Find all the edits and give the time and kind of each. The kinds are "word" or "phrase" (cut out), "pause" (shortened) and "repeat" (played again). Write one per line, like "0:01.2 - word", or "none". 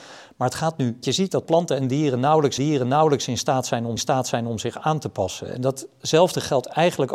0:01.0 - phrase
0:02.6 - repeat
0:04.0 - repeat